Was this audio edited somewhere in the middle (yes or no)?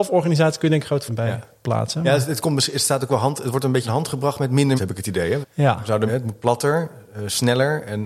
yes